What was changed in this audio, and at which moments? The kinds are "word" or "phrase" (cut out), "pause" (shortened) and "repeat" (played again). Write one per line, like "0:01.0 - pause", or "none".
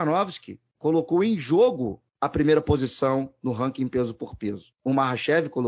none